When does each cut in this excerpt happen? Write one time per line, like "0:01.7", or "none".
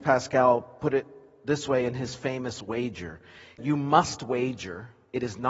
0:03.6